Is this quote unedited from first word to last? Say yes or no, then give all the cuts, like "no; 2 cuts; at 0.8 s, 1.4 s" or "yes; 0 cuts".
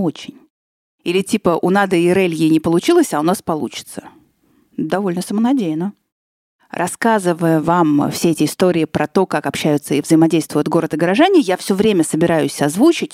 yes; 0 cuts